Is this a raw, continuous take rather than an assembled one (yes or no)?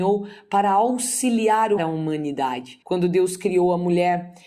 no